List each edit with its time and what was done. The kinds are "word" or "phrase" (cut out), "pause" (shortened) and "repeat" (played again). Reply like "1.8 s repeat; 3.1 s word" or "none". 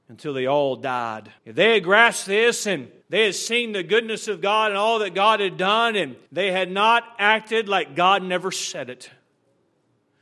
1.4 s pause; 3.0 s pause; 6.3 s pause